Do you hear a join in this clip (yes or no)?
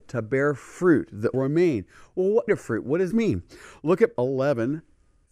yes